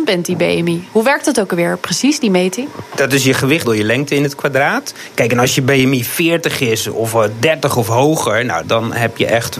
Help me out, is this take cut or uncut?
cut